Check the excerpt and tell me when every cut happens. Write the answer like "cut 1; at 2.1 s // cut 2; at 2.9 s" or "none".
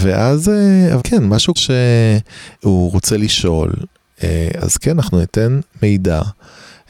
cut 1; at 1.0 s // cut 2; at 1.6 s // cut 3; at 4.6 s